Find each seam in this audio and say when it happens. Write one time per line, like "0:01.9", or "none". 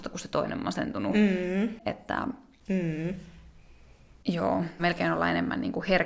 0:04.8